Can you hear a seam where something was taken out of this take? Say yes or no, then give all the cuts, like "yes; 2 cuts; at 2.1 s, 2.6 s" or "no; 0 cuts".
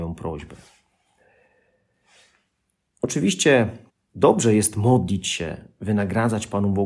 yes; 1 cut; at 3.9 s